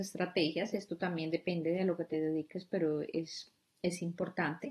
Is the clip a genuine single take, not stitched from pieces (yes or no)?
yes